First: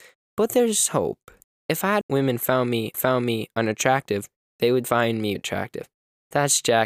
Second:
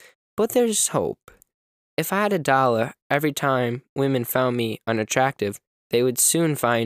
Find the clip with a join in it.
first; 5 cuts; at 1.4 s, 2.0 s, 2.9 s, 4.8 s, 5.4 s

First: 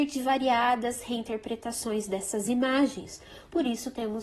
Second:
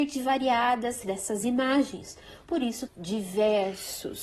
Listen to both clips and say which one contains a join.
second; 2 cuts; at 1.0 s, 2.9 s

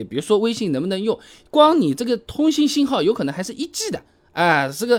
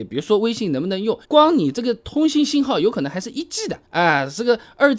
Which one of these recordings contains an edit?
second; 2 cuts; at 1.2 s, 3.9 s

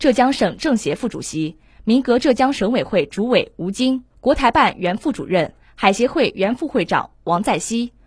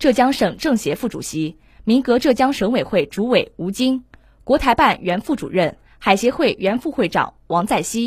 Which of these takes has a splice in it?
first; 1 cut; at 4.1 s

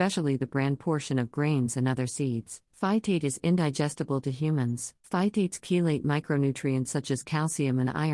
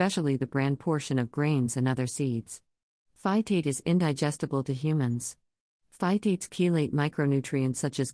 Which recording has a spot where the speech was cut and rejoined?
first; 2 cuts; at 2.7 s, 5.0 s

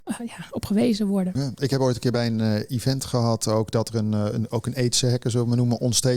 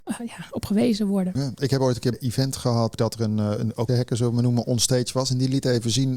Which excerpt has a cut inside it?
second; 3 cuts; at 2.1 s, 2.9 s, 3.9 s

